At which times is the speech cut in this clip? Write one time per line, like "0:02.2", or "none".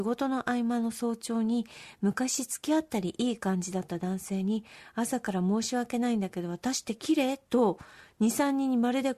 none